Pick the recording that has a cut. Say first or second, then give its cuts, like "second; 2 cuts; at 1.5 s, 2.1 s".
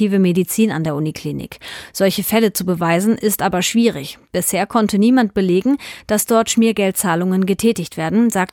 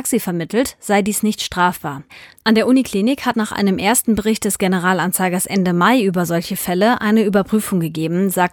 second; 1 cut; at 3.3 s